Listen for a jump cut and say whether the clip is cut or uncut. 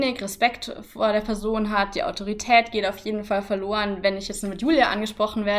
uncut